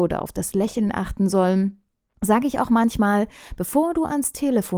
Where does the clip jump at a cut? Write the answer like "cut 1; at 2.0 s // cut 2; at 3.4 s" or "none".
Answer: none